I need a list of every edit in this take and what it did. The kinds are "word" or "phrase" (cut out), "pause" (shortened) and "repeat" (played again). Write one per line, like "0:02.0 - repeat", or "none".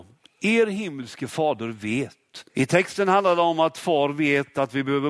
0:02.5 - pause